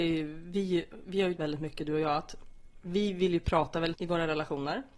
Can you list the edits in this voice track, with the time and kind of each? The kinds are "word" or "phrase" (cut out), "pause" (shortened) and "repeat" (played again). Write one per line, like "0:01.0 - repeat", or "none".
0:01.4 - word
0:03.9 - word